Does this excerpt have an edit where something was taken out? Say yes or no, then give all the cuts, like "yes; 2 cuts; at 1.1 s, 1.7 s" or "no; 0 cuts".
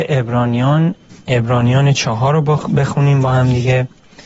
no; 0 cuts